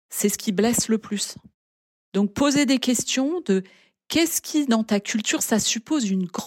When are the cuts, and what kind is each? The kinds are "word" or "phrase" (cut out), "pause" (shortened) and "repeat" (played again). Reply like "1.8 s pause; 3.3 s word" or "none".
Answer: none